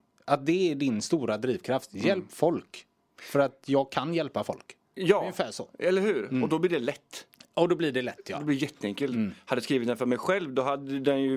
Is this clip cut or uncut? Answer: uncut